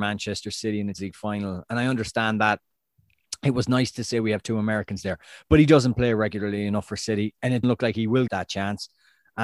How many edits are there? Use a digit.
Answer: 3